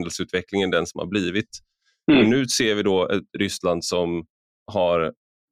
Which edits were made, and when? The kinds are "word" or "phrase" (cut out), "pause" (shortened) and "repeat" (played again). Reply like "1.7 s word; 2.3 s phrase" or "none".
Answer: none